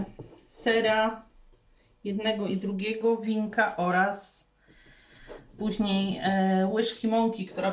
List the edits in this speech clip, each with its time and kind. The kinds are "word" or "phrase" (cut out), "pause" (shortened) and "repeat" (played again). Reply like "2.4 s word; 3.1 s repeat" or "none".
none